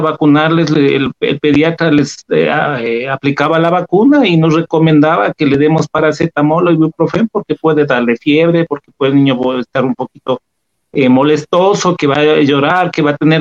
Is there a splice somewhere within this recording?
no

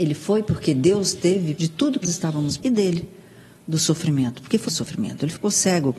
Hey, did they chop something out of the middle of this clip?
yes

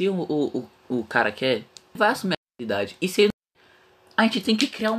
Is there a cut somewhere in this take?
yes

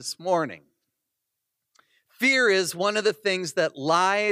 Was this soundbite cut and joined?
no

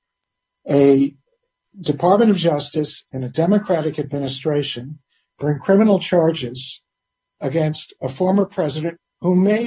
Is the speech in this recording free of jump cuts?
yes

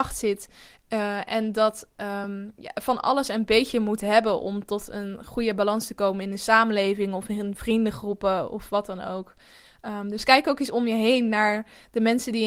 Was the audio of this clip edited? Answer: no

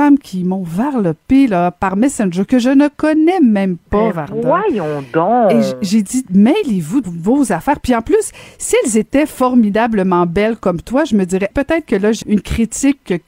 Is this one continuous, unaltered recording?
no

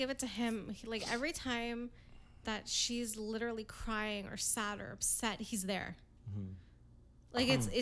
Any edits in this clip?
no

